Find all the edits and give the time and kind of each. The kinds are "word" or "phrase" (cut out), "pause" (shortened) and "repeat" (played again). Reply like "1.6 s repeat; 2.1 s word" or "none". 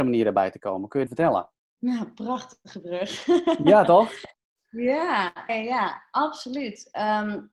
1.1 s phrase; 1.5 s pause; 4.3 s pause; 5.5 s word